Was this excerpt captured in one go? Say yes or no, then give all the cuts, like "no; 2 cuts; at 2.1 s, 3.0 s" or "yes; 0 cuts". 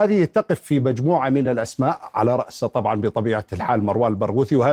yes; 0 cuts